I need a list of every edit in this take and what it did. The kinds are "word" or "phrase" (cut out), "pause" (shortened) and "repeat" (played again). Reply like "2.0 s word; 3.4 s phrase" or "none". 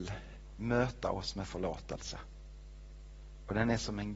1.4 s word